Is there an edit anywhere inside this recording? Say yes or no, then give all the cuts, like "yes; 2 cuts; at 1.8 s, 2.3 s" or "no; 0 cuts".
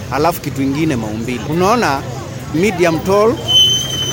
yes; 1 cut; at 2.5 s